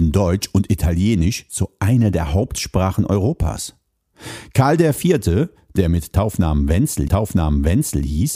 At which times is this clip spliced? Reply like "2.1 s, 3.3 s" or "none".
7.1 s